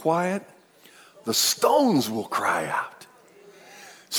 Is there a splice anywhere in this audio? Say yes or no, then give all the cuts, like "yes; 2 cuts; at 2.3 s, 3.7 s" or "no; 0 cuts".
no; 0 cuts